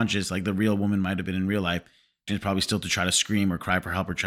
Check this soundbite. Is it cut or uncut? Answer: cut